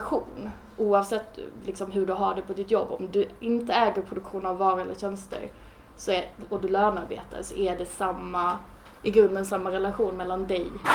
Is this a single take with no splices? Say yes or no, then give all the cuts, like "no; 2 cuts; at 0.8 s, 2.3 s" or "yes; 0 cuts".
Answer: yes; 0 cuts